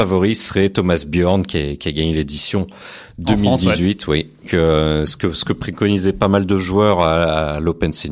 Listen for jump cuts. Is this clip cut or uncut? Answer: cut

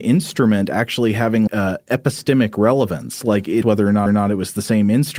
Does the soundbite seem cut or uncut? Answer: cut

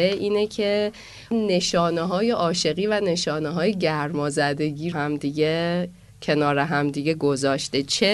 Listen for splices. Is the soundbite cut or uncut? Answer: cut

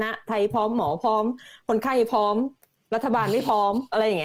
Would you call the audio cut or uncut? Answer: uncut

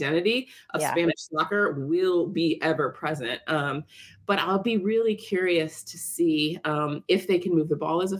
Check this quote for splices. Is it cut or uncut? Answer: uncut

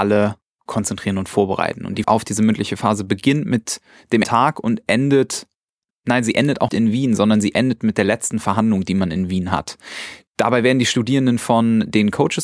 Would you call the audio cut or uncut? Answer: cut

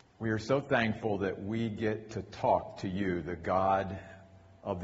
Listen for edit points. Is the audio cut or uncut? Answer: uncut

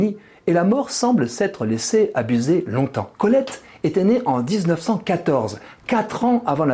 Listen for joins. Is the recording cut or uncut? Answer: cut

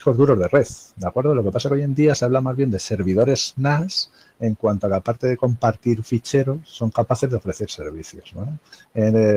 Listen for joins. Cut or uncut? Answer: uncut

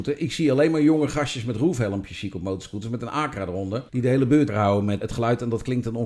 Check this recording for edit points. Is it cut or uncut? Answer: cut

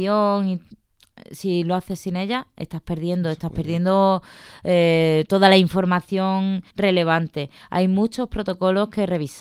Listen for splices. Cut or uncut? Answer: cut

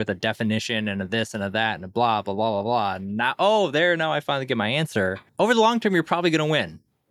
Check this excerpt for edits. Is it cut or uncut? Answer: cut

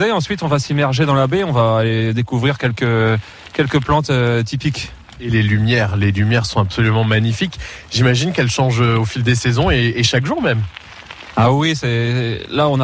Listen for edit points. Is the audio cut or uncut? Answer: uncut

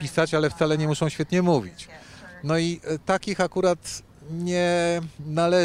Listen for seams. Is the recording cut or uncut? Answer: uncut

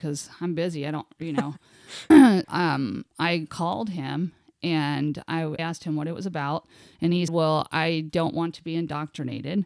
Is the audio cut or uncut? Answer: cut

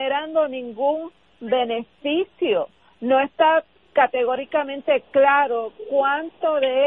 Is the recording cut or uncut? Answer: uncut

